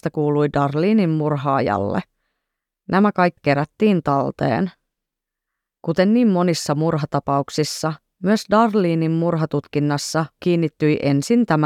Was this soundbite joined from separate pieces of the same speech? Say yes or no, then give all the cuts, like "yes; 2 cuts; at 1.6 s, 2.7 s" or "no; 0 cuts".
yes; 2 cuts; at 3.4 s, 10.4 s